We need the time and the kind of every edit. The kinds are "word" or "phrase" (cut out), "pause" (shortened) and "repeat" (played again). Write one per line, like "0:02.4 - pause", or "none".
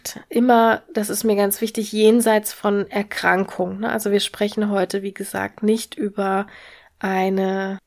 none